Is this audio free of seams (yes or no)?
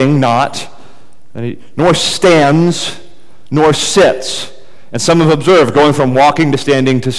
yes